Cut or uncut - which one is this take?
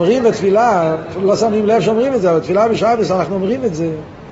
uncut